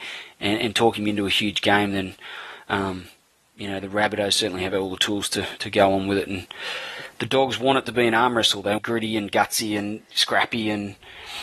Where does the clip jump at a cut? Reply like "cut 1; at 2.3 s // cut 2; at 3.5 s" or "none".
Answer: cut 1; at 8.8 s